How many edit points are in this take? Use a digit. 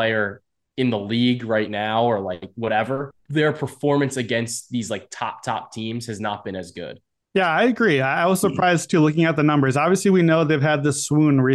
1